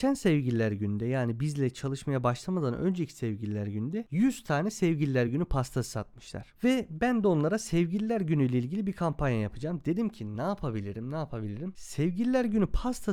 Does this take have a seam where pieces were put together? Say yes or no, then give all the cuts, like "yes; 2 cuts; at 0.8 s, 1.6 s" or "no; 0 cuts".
no; 0 cuts